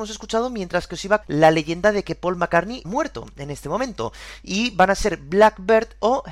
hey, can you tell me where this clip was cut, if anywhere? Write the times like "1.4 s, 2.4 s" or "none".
1.2 s, 2.8 s